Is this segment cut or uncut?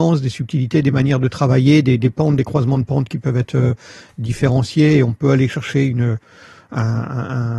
uncut